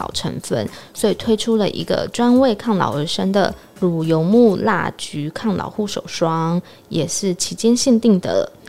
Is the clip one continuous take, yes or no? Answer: yes